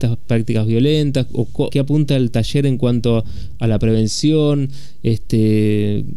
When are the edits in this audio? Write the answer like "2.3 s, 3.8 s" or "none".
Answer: 1.7 s